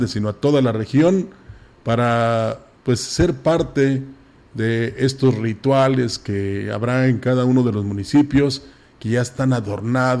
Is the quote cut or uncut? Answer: uncut